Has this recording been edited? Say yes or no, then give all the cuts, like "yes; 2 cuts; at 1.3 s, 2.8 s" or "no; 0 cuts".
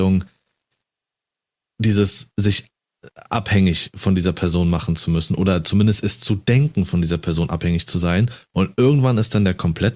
no; 0 cuts